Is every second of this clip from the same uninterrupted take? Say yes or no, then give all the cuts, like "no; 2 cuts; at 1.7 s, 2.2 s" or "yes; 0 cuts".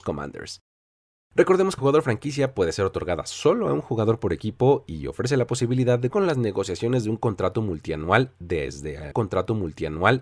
no; 3 cuts; at 1.8 s, 6.1 s, 9.1 s